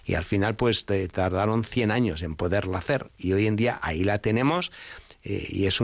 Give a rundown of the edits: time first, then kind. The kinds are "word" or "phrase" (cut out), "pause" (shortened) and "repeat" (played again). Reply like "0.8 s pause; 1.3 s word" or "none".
none